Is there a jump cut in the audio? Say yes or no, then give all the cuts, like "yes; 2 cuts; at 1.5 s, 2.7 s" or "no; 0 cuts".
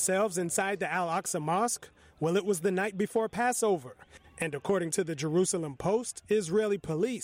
no; 0 cuts